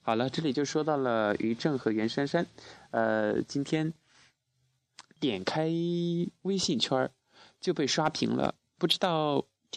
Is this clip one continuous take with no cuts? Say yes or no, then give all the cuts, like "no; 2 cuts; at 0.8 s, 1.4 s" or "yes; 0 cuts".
yes; 0 cuts